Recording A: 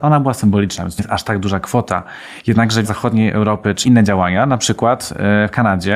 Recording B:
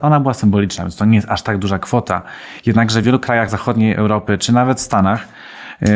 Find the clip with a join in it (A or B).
A